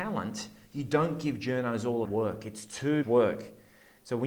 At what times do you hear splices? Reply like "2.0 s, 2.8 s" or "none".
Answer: 2.0 s, 3.0 s